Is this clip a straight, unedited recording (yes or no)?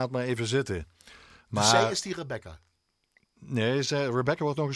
yes